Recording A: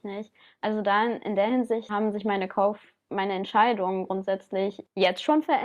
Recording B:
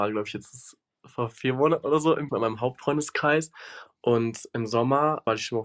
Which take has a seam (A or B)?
B